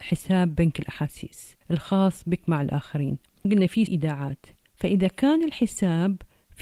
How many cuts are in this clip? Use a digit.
3